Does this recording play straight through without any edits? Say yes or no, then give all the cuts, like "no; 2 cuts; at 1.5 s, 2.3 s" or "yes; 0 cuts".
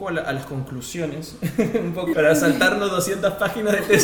no; 1 cut; at 2.1 s